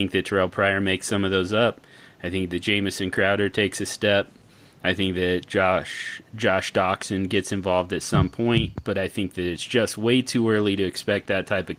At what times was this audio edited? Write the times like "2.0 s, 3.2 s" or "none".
none